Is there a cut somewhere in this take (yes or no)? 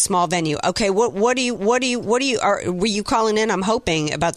yes